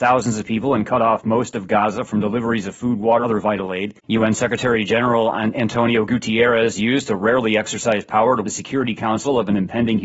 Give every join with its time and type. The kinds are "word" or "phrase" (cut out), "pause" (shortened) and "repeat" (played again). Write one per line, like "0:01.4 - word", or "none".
0:03.2 - word
0:04.0 - pause
0:08.4 - word